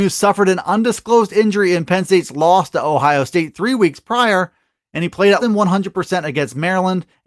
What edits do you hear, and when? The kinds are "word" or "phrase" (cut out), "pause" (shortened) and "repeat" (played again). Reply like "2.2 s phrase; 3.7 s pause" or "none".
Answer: 5.4 s word